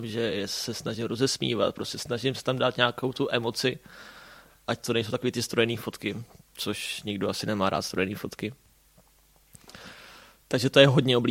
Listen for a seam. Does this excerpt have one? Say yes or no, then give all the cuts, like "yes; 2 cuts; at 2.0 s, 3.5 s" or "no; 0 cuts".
no; 0 cuts